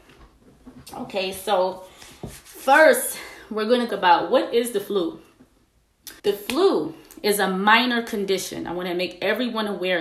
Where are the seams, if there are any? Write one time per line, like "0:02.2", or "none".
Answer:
0:03.9
0:06.2

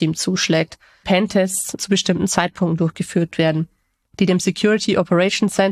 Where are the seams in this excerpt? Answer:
0:01.0
0:01.8

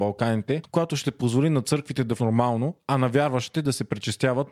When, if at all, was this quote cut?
0:02.2

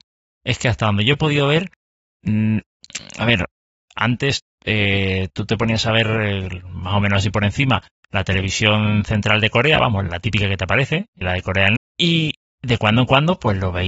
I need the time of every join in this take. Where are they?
0:10.1
0:11.2
0:11.8

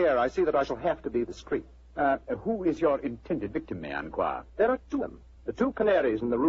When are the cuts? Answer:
0:01.2
0:04.5
0:05.0

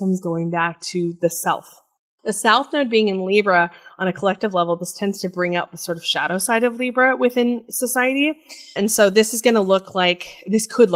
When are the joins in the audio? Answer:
0:02.2
0:08.8

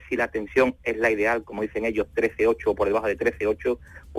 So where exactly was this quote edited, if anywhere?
none

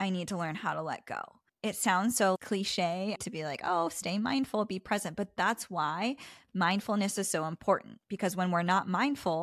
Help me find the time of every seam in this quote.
none

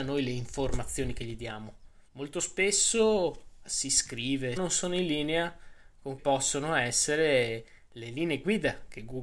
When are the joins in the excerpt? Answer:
0:02.1
0:03.6
0:04.6
0:06.2

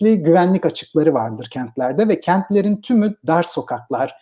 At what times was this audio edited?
none

